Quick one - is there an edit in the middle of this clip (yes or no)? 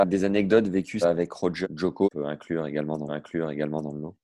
yes